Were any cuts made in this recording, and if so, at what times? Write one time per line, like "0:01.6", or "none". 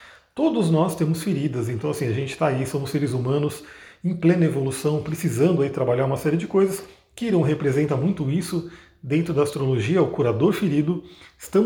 none